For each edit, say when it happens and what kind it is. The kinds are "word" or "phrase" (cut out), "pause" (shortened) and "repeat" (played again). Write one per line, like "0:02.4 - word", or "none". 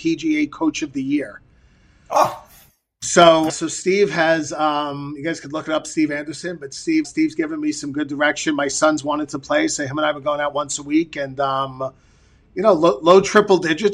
0:03.5 - word
0:07.0 - word